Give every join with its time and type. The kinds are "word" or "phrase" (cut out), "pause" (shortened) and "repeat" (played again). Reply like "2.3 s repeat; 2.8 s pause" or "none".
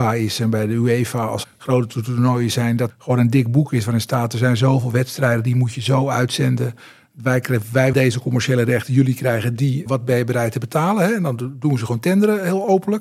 1.4 s word; 2.9 s word; 7.9 s word; 9.9 s word